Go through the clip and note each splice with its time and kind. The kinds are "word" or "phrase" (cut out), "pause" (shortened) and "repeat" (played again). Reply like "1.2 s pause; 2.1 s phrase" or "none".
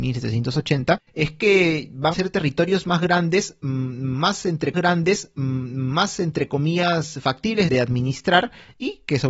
2.1 s phrase; 4.7 s repeat; 7.7 s word